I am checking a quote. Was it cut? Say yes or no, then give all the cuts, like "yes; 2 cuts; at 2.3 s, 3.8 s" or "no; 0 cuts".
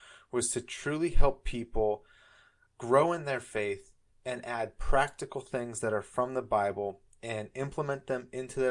no; 0 cuts